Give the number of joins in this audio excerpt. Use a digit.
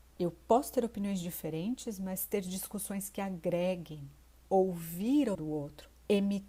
1